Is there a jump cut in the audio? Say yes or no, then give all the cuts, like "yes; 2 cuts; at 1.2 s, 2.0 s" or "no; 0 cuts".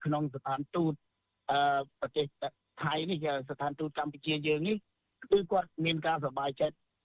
yes; 1 cut; at 5.7 s